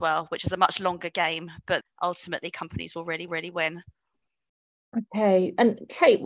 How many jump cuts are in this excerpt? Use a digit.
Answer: 2